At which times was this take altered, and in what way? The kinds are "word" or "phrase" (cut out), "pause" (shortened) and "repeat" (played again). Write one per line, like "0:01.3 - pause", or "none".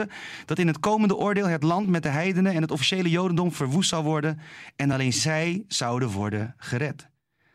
none